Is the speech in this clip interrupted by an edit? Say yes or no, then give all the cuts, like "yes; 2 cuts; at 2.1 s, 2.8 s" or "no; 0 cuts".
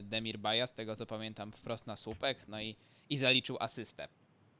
no; 0 cuts